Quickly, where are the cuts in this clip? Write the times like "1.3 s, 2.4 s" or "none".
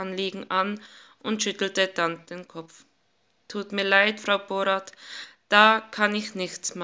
none